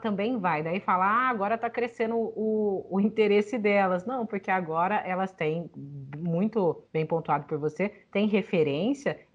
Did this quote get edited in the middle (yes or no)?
yes